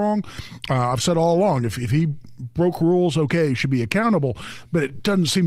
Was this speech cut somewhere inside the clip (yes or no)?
no